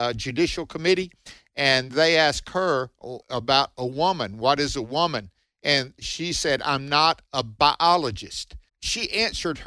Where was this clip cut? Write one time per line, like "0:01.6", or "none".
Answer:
0:03.2
0:08.7